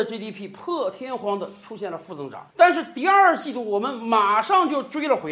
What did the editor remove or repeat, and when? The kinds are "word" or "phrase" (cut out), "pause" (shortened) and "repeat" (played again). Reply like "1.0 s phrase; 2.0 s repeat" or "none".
2.5 s pause